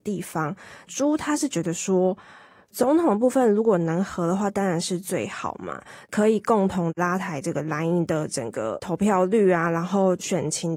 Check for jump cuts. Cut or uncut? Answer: uncut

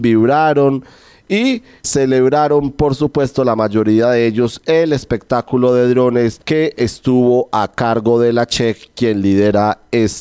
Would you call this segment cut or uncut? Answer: cut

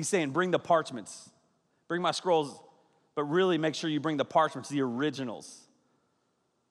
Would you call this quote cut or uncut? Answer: uncut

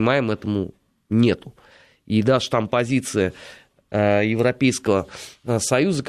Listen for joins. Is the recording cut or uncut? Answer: uncut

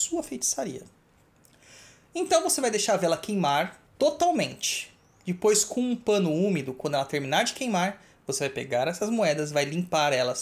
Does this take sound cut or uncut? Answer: uncut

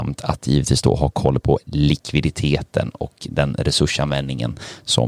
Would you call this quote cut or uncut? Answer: uncut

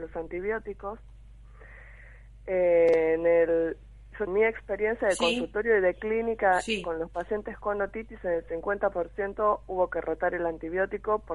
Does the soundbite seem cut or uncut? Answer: cut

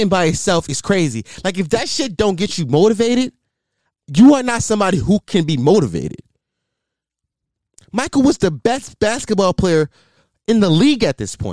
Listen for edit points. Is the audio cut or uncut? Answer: uncut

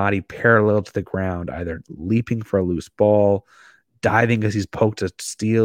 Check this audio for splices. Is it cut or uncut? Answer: uncut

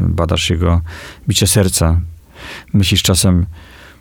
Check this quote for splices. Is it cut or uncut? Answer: uncut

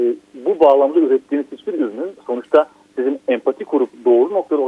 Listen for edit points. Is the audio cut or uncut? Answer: uncut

